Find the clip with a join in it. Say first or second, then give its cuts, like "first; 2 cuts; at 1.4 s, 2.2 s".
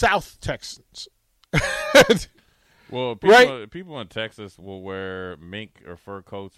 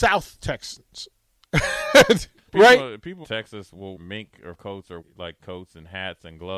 second; 5 cuts; at 2.5 s, 3.2 s, 4.0 s, 4.5 s, 5.0 s